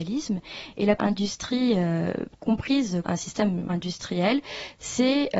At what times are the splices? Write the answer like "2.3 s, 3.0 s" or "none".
1.0 s, 3.0 s, 3.7 s